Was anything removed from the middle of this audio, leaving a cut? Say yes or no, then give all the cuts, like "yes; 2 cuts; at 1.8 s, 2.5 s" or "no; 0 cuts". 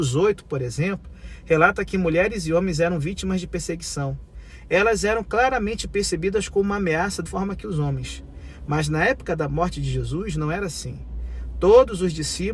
yes; 1 cut; at 7.3 s